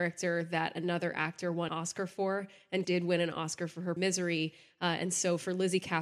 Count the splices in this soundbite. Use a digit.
3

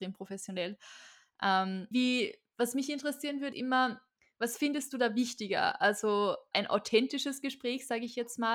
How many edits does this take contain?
3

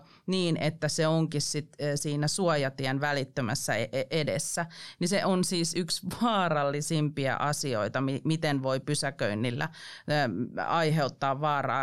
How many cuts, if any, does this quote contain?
0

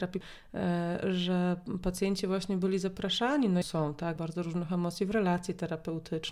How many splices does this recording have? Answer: 2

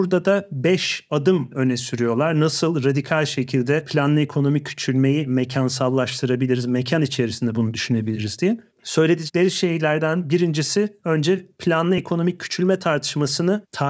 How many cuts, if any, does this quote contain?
0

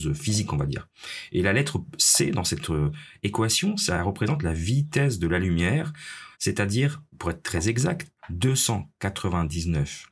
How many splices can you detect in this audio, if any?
1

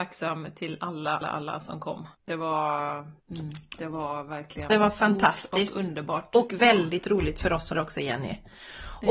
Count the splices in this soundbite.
5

